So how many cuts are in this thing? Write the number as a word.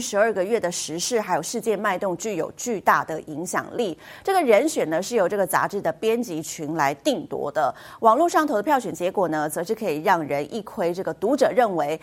zero